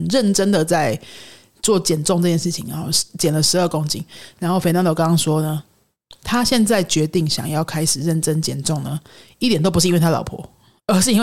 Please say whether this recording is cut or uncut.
uncut